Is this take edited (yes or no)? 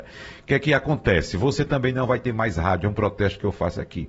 no